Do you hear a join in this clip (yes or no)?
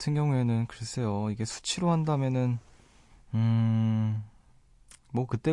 no